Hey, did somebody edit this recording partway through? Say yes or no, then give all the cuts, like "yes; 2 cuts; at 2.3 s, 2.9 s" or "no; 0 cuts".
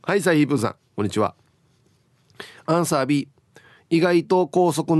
no; 0 cuts